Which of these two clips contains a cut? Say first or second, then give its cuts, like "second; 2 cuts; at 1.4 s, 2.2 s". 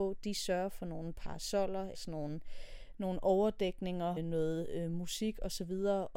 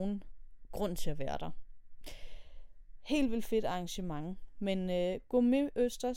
first; 2 cuts; at 1.9 s, 4.2 s